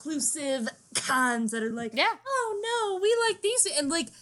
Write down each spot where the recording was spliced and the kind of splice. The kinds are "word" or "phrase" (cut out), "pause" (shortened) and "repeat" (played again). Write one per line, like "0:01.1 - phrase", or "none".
none